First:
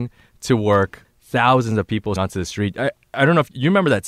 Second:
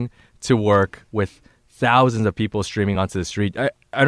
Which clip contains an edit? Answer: first; 2 cuts; at 1.0 s, 2.2 s

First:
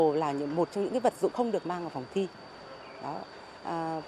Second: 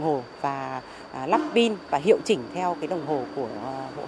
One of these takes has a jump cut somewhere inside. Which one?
first; 1 cut; at 1.3 s

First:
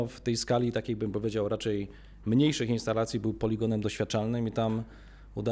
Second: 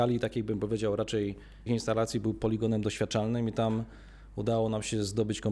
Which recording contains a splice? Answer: second; 1 cut; at 1.7 s

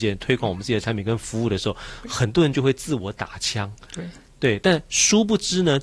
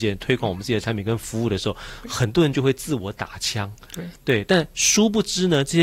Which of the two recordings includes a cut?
second; 1 cut; at 4.2 s

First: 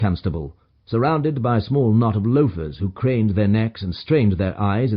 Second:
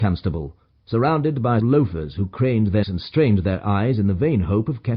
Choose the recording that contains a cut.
second; 2 cuts; at 1.6 s, 2.8 s

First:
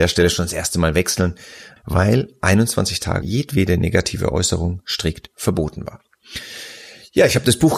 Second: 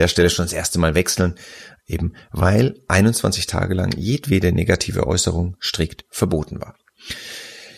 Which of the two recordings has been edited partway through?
first; 2 cuts; at 1.8 s, 3.2 s

